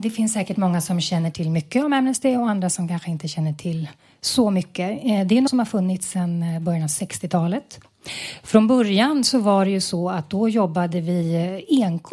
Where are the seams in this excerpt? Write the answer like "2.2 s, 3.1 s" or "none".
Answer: 5.5 s